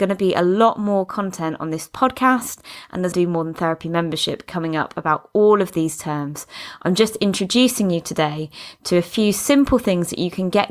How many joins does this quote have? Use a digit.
1